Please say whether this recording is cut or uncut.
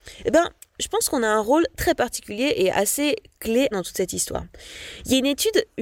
cut